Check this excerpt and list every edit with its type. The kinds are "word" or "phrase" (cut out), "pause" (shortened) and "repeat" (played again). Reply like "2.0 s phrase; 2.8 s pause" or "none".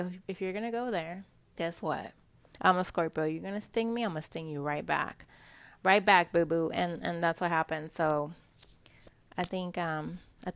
1.6 s word